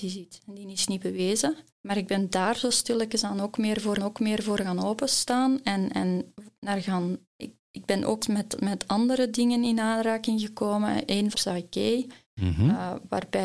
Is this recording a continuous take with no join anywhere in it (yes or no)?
no